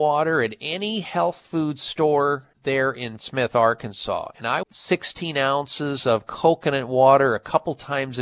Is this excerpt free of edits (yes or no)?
no